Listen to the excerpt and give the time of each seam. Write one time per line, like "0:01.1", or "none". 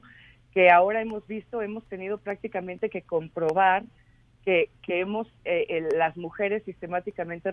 none